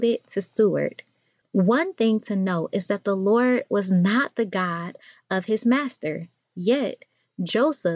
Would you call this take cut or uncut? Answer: uncut